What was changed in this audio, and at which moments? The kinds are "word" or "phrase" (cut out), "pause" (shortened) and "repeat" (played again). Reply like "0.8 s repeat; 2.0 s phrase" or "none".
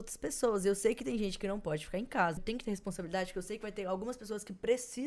2.4 s word